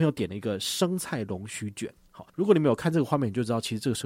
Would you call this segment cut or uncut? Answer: cut